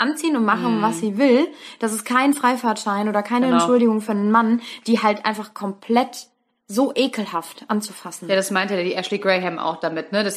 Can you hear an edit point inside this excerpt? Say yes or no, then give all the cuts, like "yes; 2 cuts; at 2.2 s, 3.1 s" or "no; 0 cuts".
no; 0 cuts